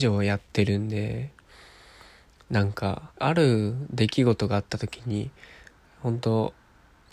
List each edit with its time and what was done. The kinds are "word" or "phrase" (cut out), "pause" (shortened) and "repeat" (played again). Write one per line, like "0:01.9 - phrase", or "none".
0:03.1 - pause